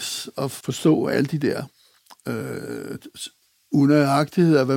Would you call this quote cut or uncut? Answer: uncut